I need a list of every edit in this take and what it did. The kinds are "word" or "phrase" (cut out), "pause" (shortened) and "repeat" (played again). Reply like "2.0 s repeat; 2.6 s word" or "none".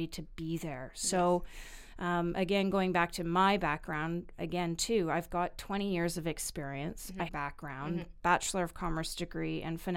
4.4 s word; 7.3 s phrase